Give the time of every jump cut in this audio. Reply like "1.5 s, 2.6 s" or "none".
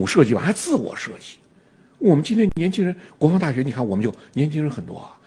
none

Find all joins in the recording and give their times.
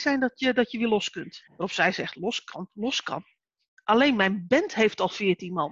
1.5 s

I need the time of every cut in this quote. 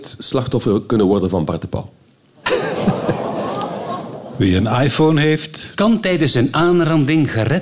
none

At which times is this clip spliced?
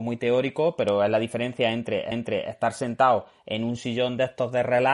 2.1 s

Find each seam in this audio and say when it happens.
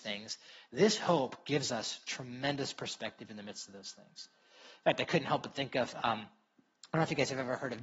none

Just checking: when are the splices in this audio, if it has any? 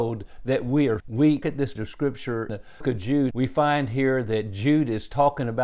1.0 s, 1.4 s, 1.8 s, 2.5 s, 2.8 s, 3.3 s

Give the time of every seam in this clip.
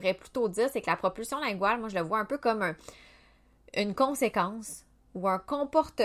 none

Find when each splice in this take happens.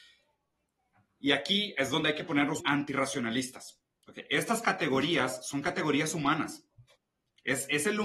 2.6 s

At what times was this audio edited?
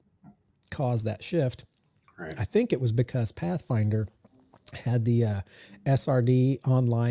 none

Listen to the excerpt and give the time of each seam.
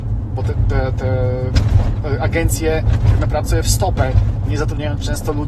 3.5 s

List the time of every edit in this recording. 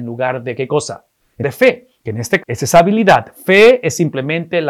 1.4 s, 2.4 s

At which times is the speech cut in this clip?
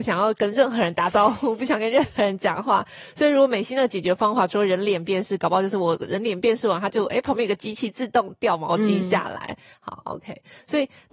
none

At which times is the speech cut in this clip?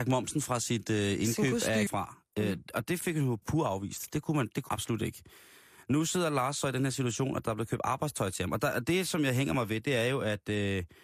1.9 s, 3.4 s, 4.7 s

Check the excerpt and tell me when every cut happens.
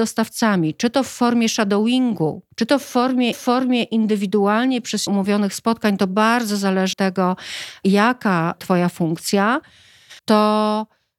2.5 s, 3.3 s, 5.1 s, 6.9 s, 8.6 s, 10.2 s

